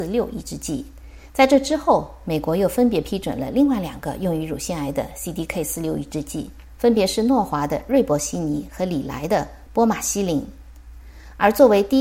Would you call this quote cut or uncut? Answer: uncut